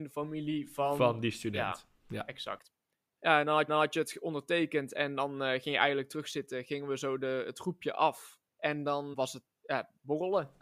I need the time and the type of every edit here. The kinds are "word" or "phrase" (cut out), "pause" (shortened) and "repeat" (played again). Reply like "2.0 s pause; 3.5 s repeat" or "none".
2.9 s pause; 3.7 s repeat; 8.5 s pause; 9.1 s word; 9.5 s word